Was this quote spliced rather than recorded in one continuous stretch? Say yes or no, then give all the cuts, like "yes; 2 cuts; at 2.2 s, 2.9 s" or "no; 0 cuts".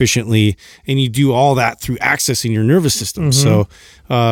no; 0 cuts